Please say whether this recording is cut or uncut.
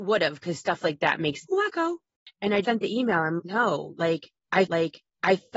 cut